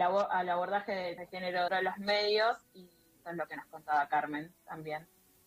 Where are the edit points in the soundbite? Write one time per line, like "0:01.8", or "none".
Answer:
0:01.2
0:01.7
0:03.2